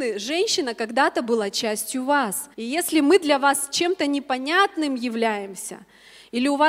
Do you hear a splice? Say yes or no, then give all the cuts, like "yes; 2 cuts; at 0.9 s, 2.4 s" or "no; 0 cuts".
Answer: yes; 1 cut; at 2.5 s